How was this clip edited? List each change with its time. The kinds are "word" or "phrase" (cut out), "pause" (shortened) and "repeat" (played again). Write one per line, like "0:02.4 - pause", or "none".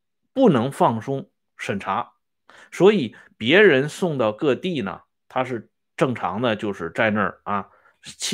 none